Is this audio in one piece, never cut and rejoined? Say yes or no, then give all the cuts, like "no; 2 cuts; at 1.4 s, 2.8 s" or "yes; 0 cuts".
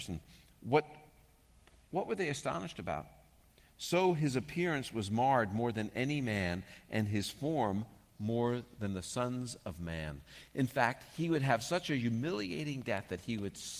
yes; 0 cuts